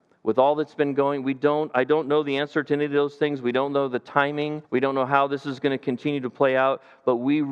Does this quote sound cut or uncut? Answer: cut